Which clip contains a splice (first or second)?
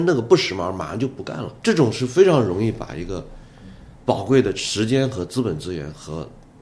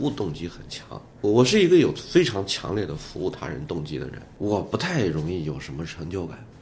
first